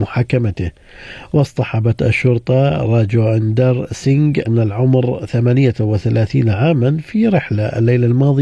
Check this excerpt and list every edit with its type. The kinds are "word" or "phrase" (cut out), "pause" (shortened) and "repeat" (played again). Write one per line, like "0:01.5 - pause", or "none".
0:04.4 - word